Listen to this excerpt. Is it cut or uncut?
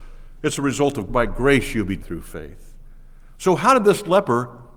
cut